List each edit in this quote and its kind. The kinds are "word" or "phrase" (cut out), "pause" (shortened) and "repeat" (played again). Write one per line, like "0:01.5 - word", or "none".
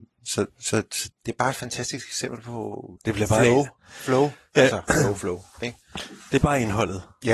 0:01.1 - word
0:03.0 - word
0:04.9 - word